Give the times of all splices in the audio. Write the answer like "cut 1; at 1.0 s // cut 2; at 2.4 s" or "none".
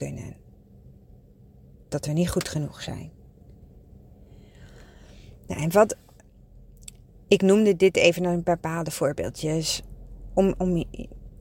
none